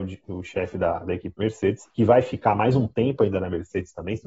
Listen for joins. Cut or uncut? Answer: cut